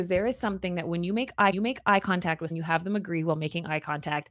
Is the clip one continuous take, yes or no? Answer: no